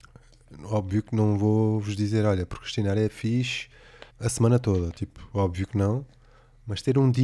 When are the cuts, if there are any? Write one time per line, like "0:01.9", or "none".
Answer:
0:04.1